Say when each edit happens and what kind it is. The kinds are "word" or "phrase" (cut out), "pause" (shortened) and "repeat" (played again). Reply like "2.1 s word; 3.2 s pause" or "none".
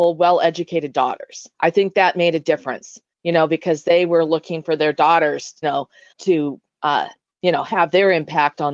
1.5 s pause; 5.6 s word; 6.1 s word